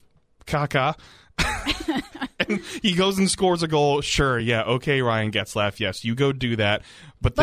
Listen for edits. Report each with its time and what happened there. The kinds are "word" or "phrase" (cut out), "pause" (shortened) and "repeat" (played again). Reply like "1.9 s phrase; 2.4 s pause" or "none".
none